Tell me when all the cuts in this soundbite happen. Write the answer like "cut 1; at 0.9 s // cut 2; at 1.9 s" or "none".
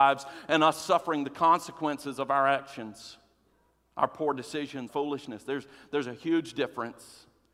cut 1; at 4.9 s